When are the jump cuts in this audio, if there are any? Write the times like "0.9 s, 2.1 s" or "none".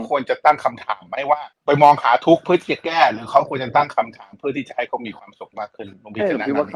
1.5 s